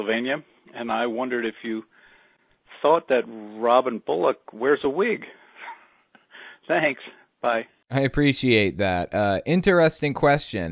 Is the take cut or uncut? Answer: uncut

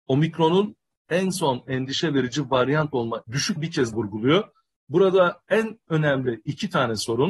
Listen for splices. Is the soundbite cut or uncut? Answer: cut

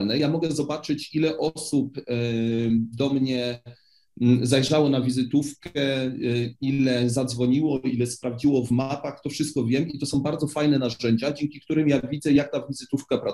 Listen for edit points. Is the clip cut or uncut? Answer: uncut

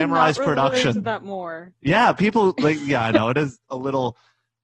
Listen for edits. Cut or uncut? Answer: uncut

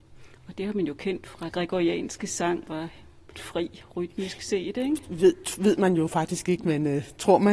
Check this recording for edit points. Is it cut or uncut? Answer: cut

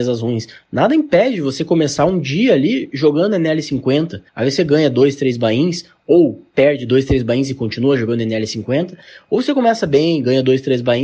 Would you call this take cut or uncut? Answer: cut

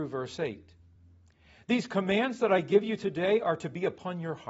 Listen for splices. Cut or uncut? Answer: uncut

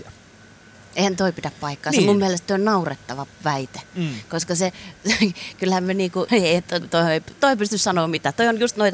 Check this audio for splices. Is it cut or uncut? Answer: cut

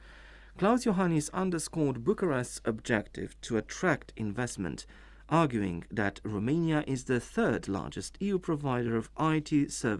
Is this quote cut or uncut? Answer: uncut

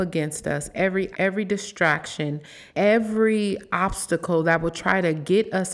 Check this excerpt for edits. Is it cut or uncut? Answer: cut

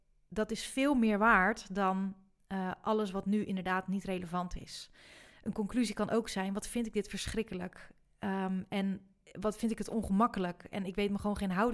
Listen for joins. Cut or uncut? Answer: uncut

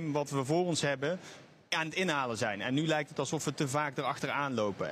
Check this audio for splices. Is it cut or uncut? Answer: uncut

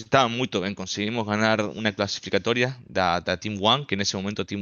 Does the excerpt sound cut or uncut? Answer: uncut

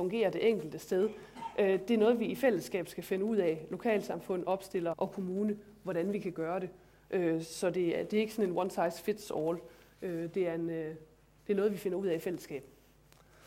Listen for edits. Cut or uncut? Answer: cut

